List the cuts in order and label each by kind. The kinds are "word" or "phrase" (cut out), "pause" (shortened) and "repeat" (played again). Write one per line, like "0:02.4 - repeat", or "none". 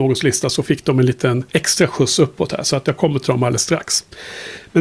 0:01.5 - pause